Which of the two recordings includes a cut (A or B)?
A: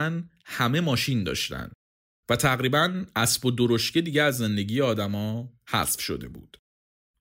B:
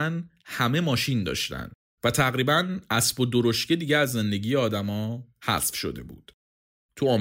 B